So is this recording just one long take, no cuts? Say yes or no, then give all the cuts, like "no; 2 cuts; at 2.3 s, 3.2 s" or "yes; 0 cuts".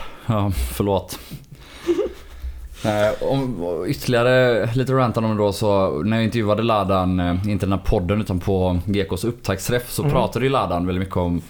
yes; 0 cuts